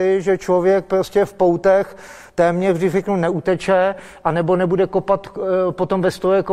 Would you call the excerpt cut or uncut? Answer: uncut